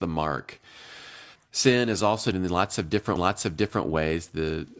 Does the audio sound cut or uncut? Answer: cut